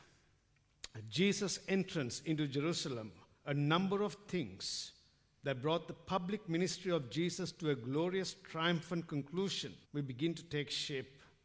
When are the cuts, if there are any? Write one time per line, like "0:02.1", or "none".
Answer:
0:09.8